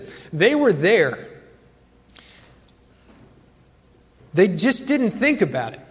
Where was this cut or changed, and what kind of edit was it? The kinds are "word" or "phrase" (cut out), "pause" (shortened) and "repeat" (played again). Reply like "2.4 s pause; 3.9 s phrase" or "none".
none